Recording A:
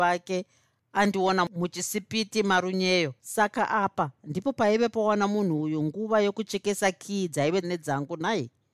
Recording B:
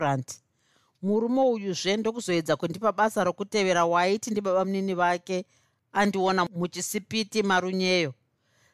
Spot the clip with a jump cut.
A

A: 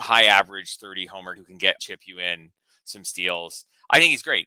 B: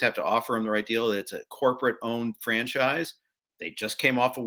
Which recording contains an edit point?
A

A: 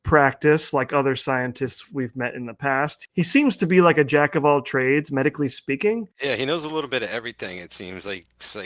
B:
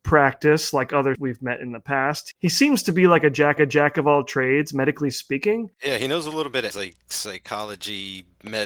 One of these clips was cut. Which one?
B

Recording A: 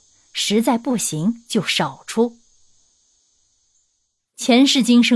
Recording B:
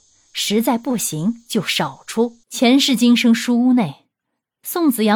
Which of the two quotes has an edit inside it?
B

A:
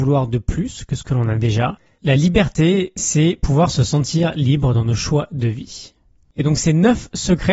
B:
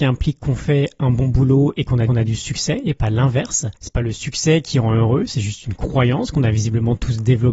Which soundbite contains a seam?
B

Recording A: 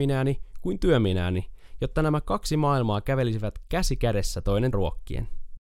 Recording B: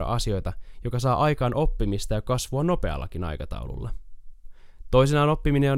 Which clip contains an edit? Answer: A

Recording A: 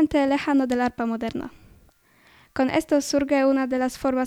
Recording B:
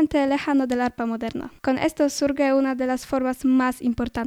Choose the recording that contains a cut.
B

